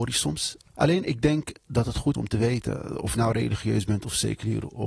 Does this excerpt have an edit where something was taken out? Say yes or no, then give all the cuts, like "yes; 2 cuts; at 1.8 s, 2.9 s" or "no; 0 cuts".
yes; 2 cuts; at 2.1 s, 3.1 s